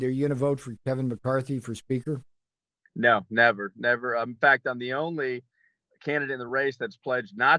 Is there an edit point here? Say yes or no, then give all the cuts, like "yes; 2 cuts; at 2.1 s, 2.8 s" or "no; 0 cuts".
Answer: no; 0 cuts